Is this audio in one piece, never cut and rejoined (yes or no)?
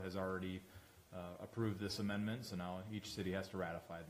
yes